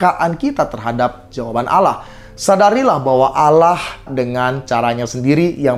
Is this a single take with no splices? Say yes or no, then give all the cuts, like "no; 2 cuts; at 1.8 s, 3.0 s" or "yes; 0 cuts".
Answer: no; 1 cut; at 4.1 s